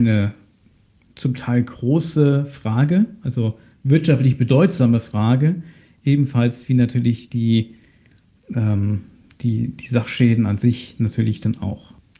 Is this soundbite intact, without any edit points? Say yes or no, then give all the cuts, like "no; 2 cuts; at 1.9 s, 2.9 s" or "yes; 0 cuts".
yes; 0 cuts